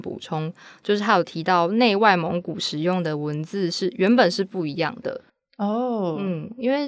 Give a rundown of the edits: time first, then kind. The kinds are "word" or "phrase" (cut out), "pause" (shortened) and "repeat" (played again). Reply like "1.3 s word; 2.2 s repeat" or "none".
5.3 s pause